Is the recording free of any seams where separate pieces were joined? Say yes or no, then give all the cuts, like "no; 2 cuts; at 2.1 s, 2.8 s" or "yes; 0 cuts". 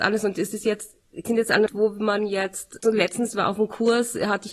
no; 3 cuts; at 1.2 s, 1.7 s, 2.8 s